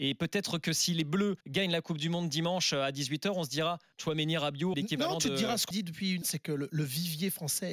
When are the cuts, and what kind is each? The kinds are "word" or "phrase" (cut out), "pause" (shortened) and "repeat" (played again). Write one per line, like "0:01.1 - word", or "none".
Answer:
0:01.4 - pause
0:03.9 - word
0:04.7 - phrase
0:05.7 - word
0:06.2 - word